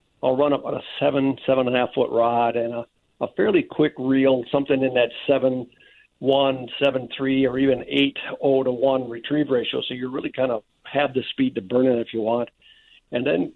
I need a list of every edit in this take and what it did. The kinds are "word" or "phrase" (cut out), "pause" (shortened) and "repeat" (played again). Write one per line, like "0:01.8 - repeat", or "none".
none